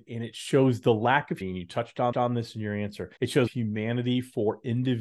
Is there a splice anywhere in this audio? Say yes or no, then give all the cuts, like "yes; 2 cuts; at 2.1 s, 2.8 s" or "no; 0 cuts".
yes; 4 cuts; at 1.4 s, 2.1 s, 3.2 s, 3.5 s